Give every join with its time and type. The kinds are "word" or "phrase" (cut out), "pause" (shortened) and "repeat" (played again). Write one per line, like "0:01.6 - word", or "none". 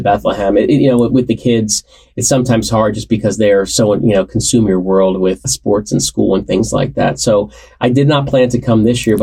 0:05.4 - word